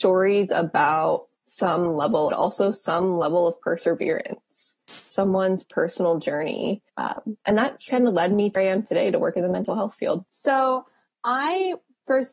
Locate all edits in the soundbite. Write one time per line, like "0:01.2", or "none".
0:01.4
0:02.3
0:06.9
0:07.9
0:08.6
0:10.3